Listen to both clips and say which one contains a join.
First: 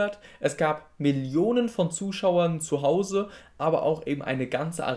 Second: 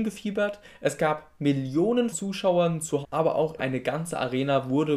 second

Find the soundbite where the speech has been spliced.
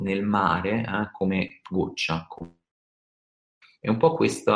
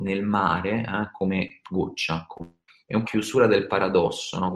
second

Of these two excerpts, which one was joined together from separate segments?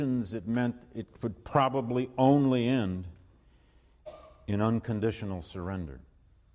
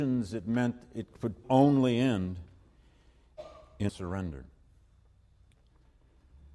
second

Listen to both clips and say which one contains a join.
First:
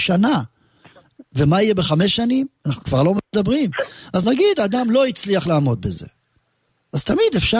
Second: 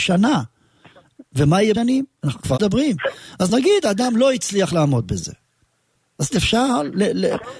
second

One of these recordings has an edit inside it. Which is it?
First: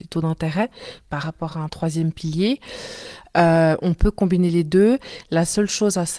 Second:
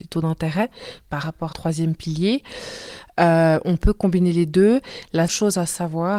second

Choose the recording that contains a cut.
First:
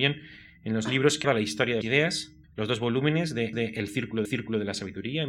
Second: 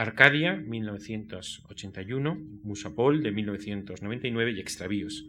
first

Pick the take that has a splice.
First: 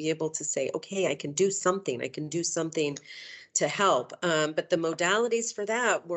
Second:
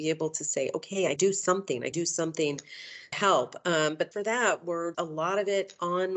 second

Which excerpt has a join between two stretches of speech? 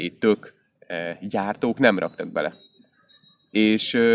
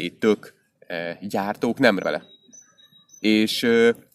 second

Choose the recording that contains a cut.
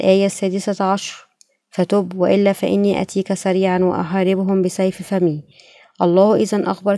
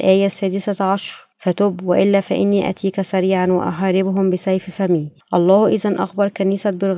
second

